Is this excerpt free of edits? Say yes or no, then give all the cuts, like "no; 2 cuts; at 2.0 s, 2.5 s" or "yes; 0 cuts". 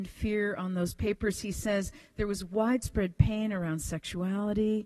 yes; 0 cuts